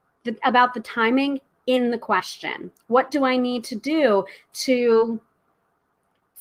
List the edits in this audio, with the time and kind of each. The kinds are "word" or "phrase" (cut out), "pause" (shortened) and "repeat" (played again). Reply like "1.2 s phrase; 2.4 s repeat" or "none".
none